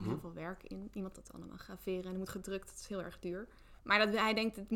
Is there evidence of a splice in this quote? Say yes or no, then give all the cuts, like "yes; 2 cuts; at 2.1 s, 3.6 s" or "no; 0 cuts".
yes; 3 cuts; at 1.1 s, 2.3 s, 3.8 s